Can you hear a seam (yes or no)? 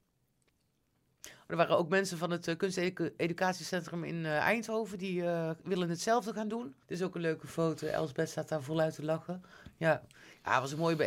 yes